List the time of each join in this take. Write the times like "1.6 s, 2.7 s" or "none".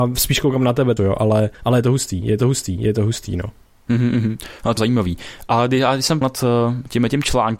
1.0 s, 1.5 s, 2.4 s, 3.6 s, 4.8 s, 6.2 s